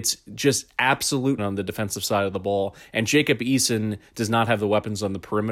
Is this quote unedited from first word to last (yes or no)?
no